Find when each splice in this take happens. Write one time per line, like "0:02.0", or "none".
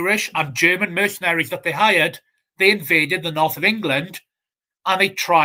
none